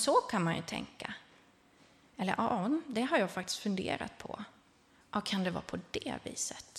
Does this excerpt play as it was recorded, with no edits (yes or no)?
yes